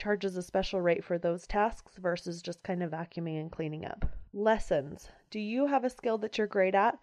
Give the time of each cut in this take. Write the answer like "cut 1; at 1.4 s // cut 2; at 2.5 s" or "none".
cut 1; at 4.3 s